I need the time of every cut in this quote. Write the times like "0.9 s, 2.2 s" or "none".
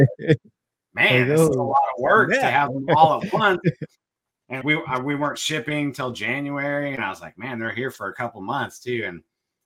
4.6 s